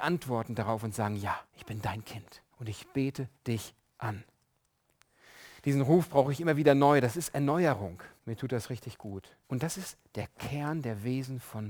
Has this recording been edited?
yes; 6 cuts; at 1.5 s, 2.5 s, 3.4 s, 5.6 s, 8.2 s, 9.4 s

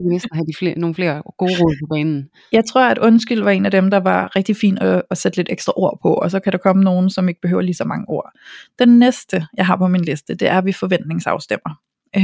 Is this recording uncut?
yes; 0 cuts

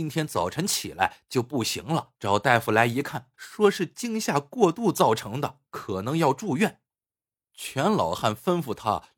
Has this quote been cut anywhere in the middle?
yes; 4 cuts; at 2.2 s, 3.3 s, 5.7 s, 6.9 s

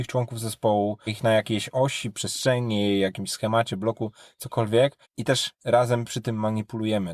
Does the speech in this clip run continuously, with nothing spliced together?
no; 2 cuts; at 1.1 s, 5.0 s

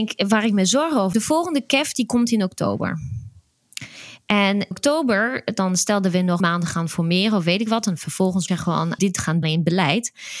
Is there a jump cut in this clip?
yes; 6 cuts; at 1.1 s, 4.7 s, 6.4 s, 8.5 s, 9.0 s, 9.4 s

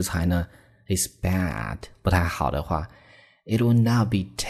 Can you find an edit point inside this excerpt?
no; 0 cuts

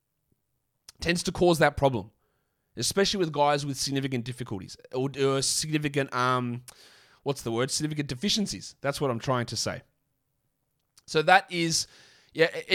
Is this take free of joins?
yes; 0 cuts

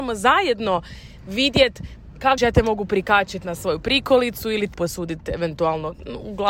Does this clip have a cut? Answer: yes; 2 cuts; at 2.4 s, 4.7 s

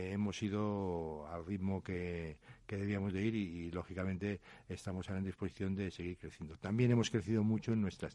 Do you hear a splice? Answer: no; 0 cuts

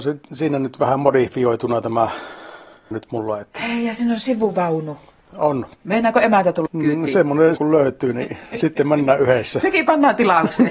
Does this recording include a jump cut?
yes; 4 cuts; at 2.9 s, 5.7 s, 6.7 s, 7.6 s

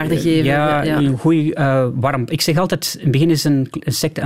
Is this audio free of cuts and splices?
yes; 0 cuts

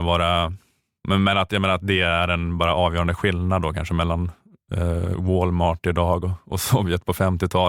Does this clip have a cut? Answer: no; 0 cuts

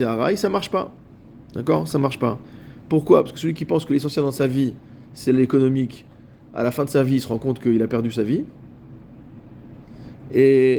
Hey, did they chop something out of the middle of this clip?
no; 0 cuts

